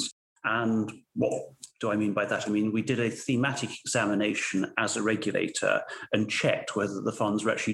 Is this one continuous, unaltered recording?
yes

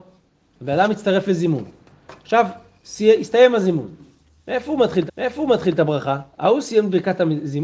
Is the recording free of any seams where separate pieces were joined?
no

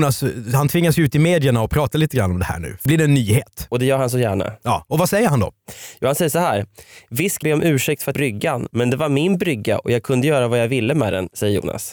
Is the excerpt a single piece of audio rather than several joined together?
no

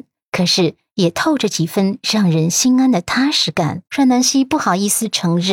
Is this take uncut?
no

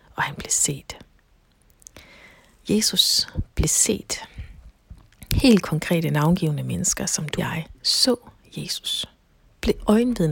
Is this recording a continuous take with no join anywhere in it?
no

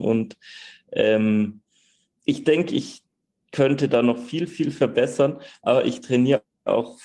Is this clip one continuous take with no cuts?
yes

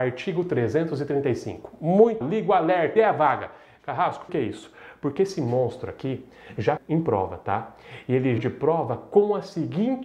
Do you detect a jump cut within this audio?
yes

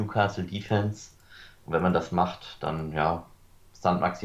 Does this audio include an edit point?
no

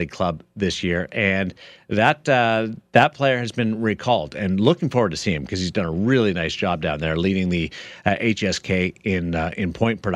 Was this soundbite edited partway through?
no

